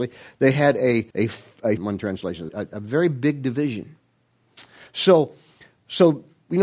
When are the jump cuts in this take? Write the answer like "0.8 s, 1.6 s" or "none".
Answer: 1.1 s, 1.8 s, 2.5 s